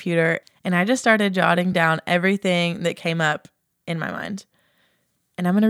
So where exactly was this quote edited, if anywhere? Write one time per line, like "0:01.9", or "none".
none

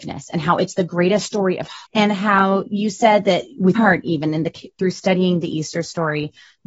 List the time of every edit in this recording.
0:01.8
0:03.8

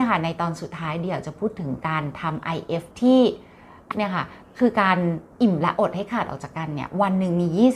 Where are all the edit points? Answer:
0:02.9
0:03.9
0:05.3

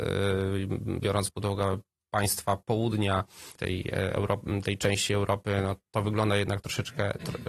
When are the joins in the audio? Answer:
0:03.6

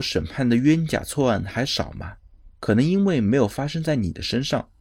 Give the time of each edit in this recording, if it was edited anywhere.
0:02.5

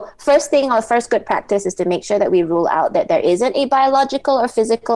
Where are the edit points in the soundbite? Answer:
none

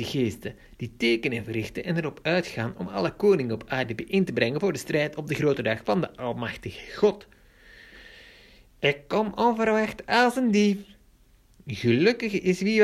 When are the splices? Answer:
none

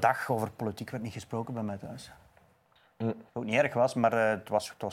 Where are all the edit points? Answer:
0:03.3

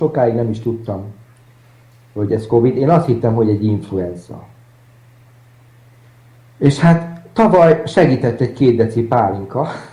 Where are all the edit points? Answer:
none

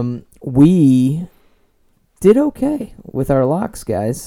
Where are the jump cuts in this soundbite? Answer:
none

